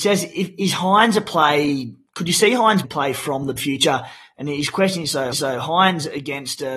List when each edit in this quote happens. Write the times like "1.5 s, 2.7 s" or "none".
2.1 s, 2.8 s, 3.6 s, 5.3 s